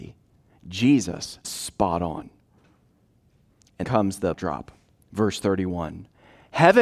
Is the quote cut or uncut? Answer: cut